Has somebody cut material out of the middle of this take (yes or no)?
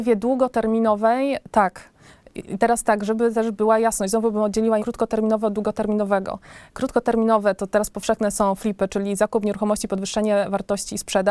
yes